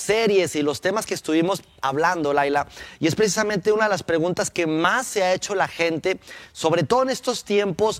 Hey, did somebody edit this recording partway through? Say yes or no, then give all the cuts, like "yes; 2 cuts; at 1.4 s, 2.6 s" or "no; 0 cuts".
no; 0 cuts